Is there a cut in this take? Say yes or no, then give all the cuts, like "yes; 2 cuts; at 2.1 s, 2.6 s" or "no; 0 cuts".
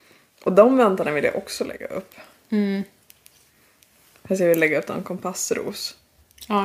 no; 0 cuts